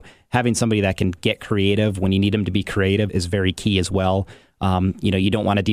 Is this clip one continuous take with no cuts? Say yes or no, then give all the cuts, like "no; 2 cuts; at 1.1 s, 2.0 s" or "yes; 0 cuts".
no; 1 cut; at 3.1 s